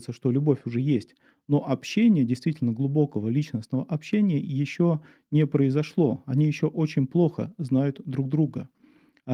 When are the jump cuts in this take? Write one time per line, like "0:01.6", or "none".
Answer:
none